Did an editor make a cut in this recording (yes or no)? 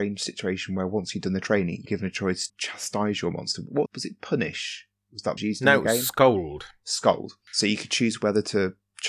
yes